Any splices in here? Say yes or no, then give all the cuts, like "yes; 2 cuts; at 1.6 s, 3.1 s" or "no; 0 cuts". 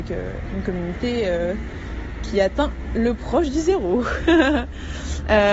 no; 0 cuts